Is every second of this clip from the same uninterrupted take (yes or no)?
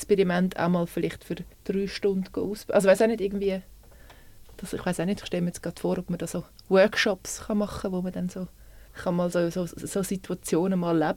no